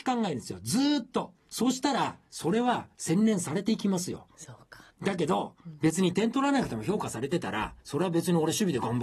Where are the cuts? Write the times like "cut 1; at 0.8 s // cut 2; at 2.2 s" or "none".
cut 1; at 4.9 s // cut 2; at 7.8 s